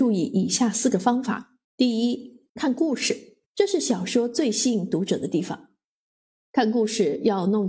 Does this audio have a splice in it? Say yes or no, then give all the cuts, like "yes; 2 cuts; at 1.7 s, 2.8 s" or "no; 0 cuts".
yes; 3 cuts; at 1.6 s, 2.5 s, 3.5 s